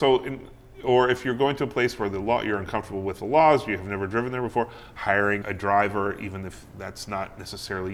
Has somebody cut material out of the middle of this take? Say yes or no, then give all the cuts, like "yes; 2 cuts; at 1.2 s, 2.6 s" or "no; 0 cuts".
yes; 1 cut; at 5.4 s